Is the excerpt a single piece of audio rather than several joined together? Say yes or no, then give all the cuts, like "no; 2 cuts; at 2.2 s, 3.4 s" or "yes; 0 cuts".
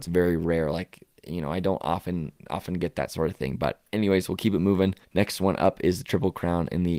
no; 2 cuts; at 3.9 s, 5.0 s